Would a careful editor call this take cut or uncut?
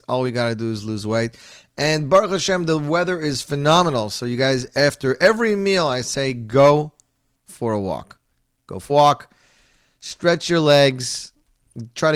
cut